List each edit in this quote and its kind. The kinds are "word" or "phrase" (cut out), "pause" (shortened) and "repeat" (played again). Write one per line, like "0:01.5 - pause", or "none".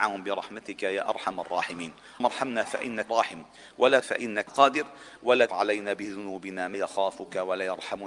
0:02.2 - word
0:03.1 - word
0:04.0 - word
0:04.5 - word
0:05.5 - word
0:06.7 - word